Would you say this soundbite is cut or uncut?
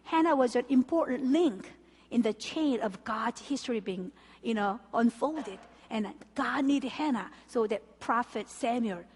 uncut